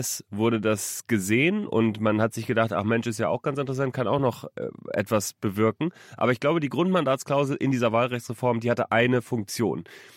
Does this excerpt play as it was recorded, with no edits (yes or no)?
yes